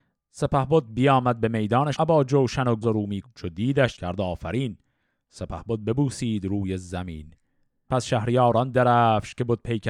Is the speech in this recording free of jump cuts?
no; 5 cuts; at 1.9 s, 2.8 s, 3.2 s, 3.9 s, 7.9 s

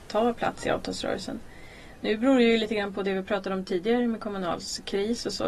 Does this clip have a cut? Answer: no; 0 cuts

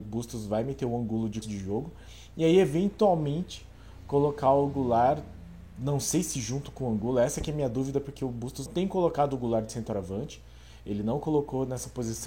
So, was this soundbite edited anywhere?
yes; 2 cuts; at 1.4 s, 8.7 s

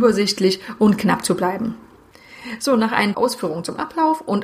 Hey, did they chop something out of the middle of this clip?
yes; 1 cut; at 3.1 s

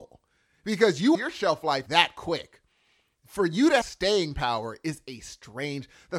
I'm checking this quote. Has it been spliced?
yes; 3 cuts; at 1.1 s, 1.9 s, 3.8 s

